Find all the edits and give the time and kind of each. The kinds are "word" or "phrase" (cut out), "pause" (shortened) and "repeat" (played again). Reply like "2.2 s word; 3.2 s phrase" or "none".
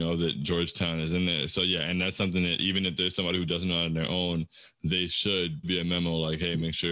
5.6 s phrase